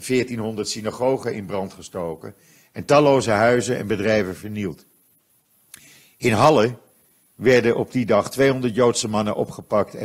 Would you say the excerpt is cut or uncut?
uncut